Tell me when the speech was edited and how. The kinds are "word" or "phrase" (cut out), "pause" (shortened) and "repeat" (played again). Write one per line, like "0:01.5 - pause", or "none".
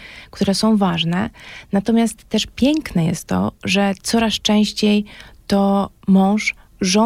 none